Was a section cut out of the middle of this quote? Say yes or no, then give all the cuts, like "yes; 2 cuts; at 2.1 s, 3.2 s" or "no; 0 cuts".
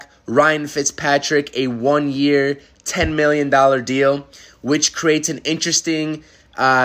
no; 0 cuts